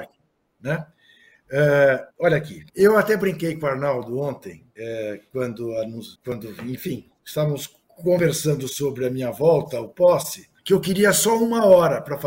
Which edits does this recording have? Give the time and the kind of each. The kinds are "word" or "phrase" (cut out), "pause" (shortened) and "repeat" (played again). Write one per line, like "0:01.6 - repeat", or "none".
0:02.1 - pause
0:02.7 - pause
0:04.7 - pause
0:06.1 - pause
0:07.8 - pause
0:10.6 - pause

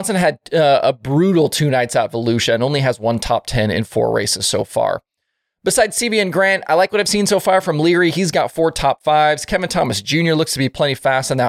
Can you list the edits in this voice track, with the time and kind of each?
none

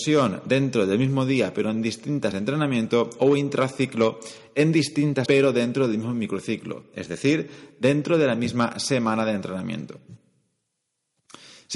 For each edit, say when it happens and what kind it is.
0:02.3 - word
0:05.3 - phrase

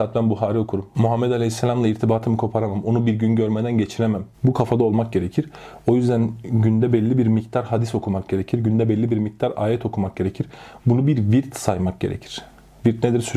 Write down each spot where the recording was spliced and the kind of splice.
0:04.3 - pause

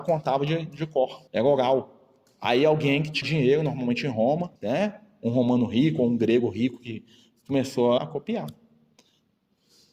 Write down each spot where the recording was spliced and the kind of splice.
0:01.3 - pause
0:03.2 - word
0:04.6 - pause
0:08.0 - word

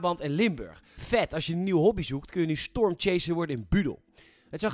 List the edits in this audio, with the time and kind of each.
none

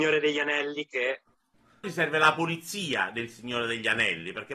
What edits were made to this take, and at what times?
0:01.8 - phrase

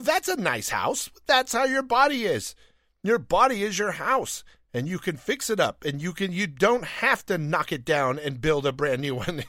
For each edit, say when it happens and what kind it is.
none

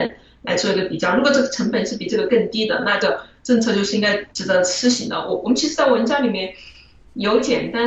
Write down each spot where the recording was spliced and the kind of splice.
0:04.3 - pause

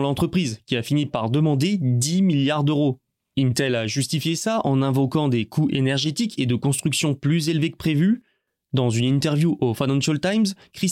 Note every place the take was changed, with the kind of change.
none

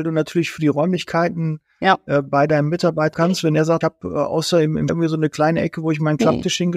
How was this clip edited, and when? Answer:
0:03.1 - phrase
0:03.8 - word
0:04.9 - word

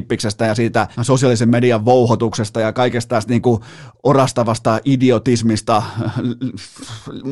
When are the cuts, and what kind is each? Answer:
0:00.9 - pause

